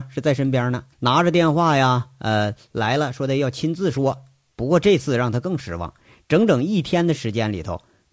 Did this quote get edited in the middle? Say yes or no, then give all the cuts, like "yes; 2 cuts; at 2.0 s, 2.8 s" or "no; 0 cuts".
yes; 1 cut; at 0.9 s